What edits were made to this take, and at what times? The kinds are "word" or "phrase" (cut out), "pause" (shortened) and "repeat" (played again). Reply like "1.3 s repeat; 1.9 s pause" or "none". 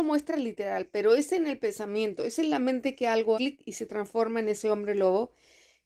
3.3 s word